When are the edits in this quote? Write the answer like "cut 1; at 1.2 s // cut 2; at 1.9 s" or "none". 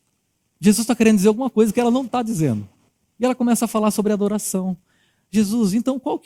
none